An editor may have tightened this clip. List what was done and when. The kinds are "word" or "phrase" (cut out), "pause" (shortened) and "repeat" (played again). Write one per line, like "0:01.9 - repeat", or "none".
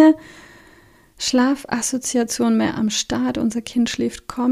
none